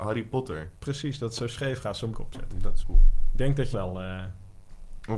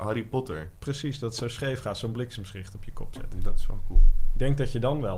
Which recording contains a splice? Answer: first; 3 cuts; at 2.1 s, 2.8 s, 3.7 s

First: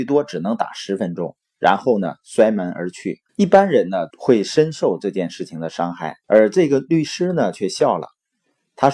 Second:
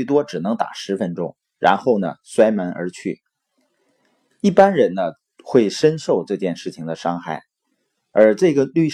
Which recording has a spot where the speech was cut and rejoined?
first; 3 cuts; at 3.3 s, 4.1 s, 6.2 s

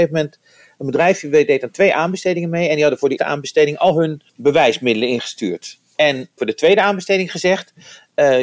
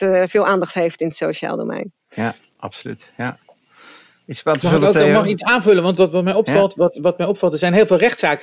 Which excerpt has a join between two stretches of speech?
first; 3 cuts; at 3.2 s, 4.3 s, 6.4 s

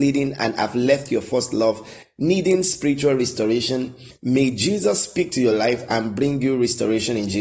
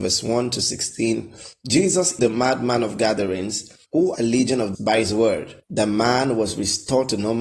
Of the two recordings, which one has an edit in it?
second; 4 cuts; at 2.2 s, 4.1 s, 4.7 s, 5.6 s

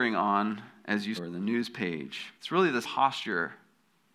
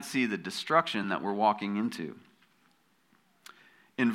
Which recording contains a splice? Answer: first; 3 cuts; at 1.2 s, 2.4 s, 2.8 s

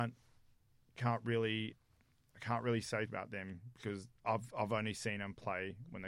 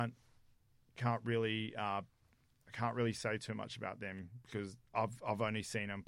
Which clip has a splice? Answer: first; 2 cuts; at 1.7 s, 3.1 s

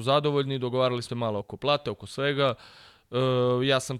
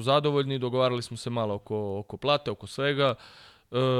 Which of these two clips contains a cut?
first; 2 cuts; at 1.1 s, 1.4 s

